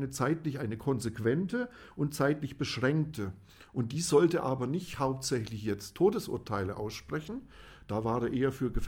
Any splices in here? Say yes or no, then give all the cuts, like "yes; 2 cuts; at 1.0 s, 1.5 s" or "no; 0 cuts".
no; 0 cuts